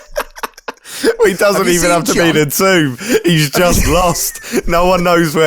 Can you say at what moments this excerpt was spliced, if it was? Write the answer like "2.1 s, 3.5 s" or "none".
none